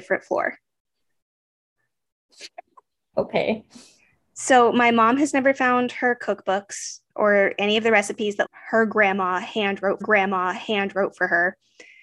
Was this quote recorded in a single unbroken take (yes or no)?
no